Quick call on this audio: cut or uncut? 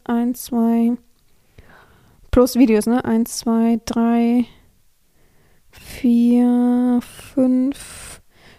uncut